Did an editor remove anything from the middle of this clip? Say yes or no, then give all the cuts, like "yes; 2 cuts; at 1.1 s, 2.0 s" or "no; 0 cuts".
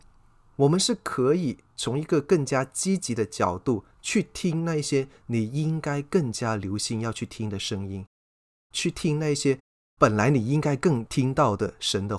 yes; 1 cut; at 3.9 s